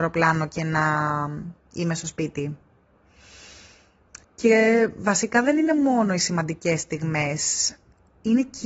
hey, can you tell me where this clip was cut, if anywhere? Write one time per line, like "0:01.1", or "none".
0:04.2